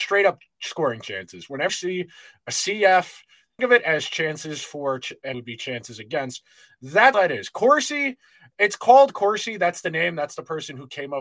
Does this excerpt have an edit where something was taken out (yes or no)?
yes